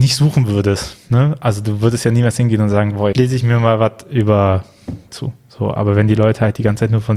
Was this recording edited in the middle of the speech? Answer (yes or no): yes